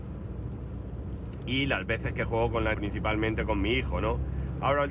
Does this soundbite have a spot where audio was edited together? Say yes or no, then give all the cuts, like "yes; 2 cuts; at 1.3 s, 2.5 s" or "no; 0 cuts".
yes; 1 cut; at 2.7 s